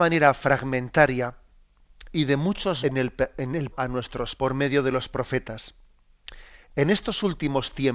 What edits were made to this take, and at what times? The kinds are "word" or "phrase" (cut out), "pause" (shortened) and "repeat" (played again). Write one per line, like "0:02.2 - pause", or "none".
0:02.8 - phrase
0:03.7 - word
0:04.4 - word